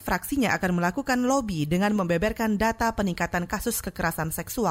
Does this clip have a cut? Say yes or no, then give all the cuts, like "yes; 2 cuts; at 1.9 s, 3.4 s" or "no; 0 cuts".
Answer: no; 0 cuts